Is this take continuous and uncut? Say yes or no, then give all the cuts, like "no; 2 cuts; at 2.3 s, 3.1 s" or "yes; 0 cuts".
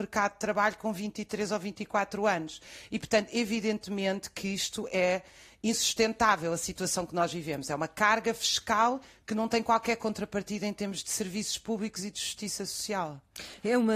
yes; 0 cuts